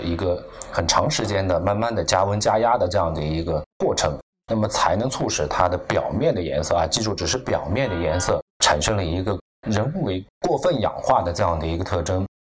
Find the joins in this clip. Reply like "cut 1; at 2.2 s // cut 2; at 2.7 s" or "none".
cut 1; at 3.7 s // cut 2; at 8.5 s // cut 3; at 9.4 s // cut 4; at 10.4 s